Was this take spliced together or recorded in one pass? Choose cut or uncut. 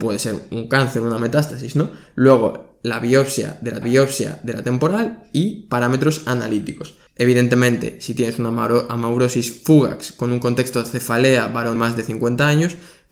cut